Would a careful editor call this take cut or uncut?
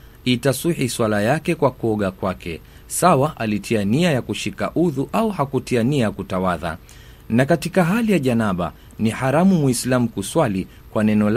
uncut